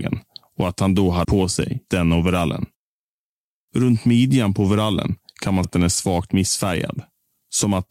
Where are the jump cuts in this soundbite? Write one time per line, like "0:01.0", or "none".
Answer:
0:01.2
0:01.9
0:05.6